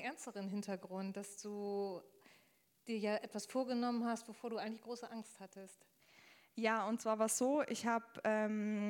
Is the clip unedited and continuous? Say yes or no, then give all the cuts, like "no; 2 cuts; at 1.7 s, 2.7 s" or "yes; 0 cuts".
yes; 0 cuts